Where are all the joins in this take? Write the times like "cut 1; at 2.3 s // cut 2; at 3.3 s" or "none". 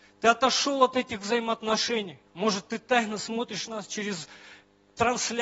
cut 1; at 2.3 s